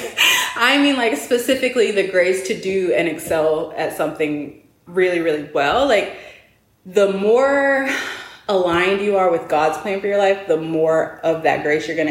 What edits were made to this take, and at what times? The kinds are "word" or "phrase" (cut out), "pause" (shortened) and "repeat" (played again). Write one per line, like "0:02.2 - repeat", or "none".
0:04.9 - word

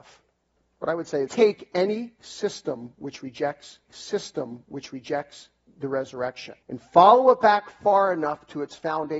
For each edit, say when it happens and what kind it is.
0:01.3 - phrase
0:03.9 - repeat
0:06.6 - pause

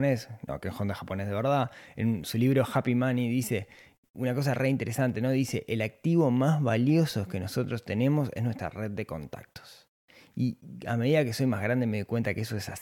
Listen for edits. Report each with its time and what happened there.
none

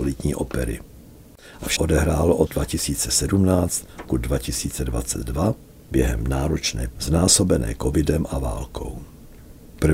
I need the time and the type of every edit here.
0:01.8 - word
0:02.5 - word
0:04.1 - word
0:06.9 - word

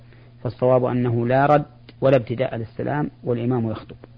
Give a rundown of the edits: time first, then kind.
0:01.9 - pause

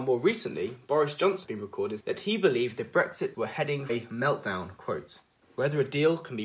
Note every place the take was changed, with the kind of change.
0:01.4 - word
0:02.0 - word
0:03.3 - word
0:03.9 - word
0:05.4 - pause

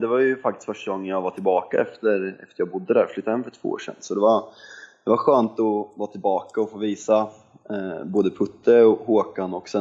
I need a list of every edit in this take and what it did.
none

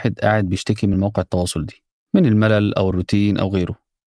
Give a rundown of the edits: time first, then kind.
none

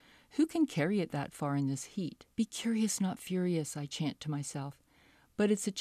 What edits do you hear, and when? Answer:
0:02.3 - pause

